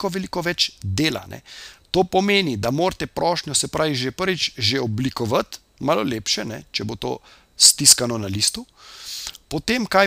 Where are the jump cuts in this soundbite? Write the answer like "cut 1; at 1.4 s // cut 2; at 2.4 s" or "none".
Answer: none